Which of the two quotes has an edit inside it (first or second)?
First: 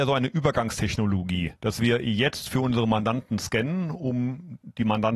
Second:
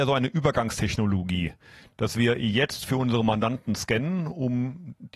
first